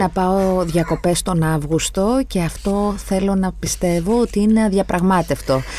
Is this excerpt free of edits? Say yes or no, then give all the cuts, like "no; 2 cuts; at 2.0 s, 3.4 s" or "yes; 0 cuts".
yes; 0 cuts